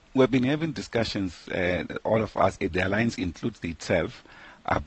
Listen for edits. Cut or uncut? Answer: cut